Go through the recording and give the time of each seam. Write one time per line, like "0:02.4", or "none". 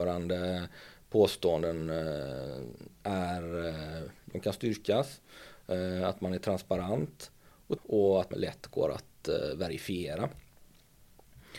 0:04.2
0:07.8
0:08.3